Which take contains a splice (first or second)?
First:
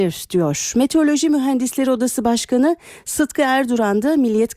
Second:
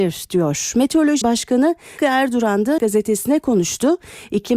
second